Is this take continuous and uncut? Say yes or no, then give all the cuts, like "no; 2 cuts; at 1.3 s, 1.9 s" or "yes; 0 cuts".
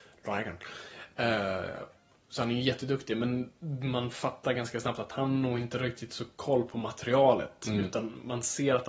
yes; 0 cuts